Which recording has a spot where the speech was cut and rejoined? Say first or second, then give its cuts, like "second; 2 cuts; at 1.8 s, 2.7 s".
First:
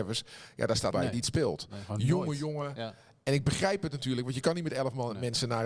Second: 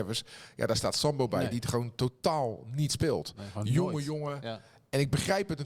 first; 2 cuts; at 0.9 s, 1.2 s